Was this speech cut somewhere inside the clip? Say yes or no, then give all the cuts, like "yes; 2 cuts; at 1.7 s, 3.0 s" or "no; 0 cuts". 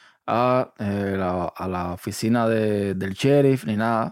no; 0 cuts